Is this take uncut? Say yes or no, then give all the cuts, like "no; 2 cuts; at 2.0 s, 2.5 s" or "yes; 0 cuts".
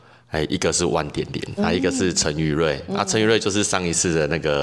no; 1 cut; at 1.6 s